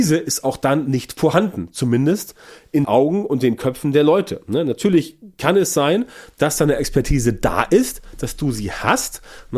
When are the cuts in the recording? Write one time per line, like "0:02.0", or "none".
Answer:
0:02.8